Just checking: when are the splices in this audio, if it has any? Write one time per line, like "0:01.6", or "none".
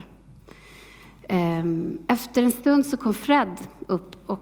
none